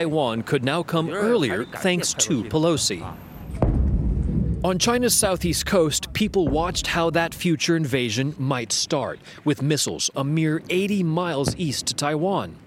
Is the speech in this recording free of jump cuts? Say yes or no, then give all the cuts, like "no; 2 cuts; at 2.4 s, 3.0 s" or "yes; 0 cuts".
no; 1 cut; at 10.1 s